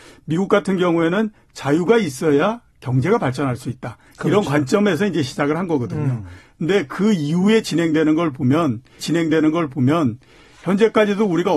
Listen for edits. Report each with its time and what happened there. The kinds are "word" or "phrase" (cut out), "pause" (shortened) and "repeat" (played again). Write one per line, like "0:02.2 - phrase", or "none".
0:09.0 - repeat